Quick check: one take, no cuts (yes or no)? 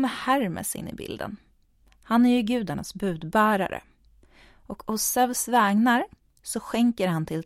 yes